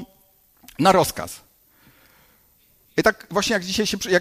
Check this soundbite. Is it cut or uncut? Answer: uncut